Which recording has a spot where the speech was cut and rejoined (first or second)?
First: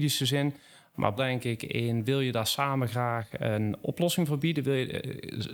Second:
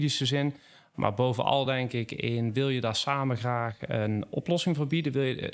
first